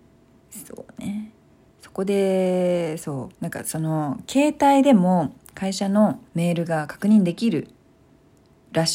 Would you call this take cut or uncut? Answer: cut